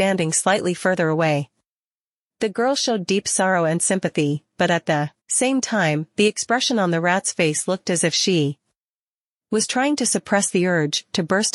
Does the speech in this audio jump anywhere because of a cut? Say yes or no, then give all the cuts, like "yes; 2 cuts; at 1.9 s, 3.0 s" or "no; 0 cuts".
yes; 1 cut; at 5.2 s